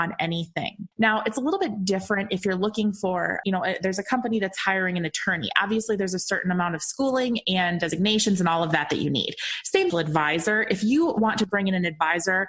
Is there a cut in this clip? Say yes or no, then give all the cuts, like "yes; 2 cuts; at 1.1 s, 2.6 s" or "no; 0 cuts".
yes; 3 cuts; at 0.9 s, 3.4 s, 9.9 s